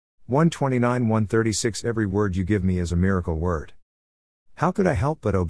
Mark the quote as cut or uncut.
uncut